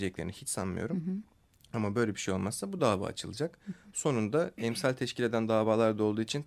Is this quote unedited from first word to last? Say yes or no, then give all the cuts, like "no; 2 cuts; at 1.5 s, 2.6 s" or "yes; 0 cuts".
yes; 0 cuts